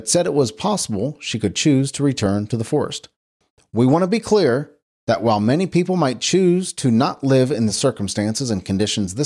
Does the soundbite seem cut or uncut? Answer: uncut